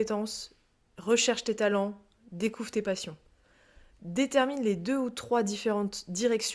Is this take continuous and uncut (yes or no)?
yes